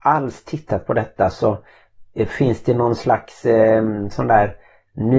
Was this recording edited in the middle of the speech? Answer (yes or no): no